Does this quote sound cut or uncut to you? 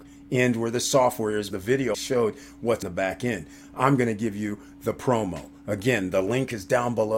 cut